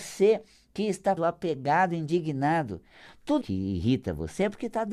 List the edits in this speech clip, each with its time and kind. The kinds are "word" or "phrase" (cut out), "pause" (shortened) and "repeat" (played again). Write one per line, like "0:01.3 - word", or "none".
0:01.2 - word
0:03.4 - word